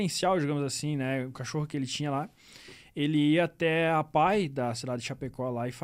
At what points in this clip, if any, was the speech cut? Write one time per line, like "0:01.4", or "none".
0:01.3